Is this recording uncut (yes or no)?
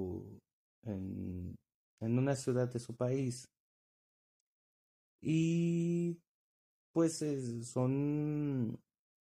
yes